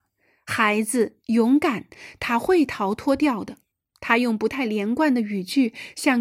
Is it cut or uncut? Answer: cut